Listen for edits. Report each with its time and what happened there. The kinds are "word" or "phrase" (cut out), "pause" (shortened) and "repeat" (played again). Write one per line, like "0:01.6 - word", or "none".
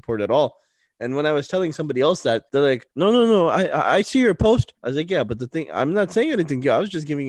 0:02.5 - pause
0:02.9 - pause
0:04.8 - pause